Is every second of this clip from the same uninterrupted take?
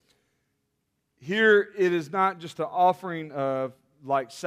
yes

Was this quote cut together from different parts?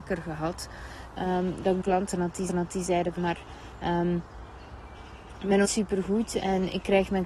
yes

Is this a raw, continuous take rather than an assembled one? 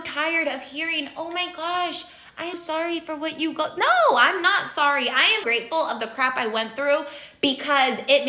no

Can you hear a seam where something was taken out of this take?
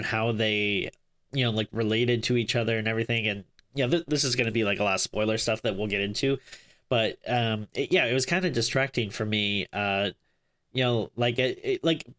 no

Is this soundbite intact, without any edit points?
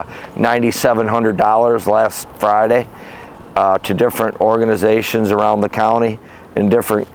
yes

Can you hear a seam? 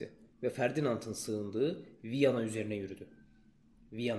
no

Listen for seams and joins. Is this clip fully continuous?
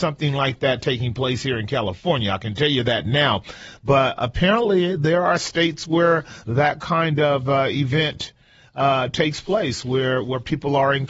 yes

